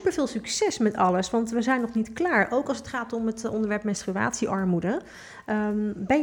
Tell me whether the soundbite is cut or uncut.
uncut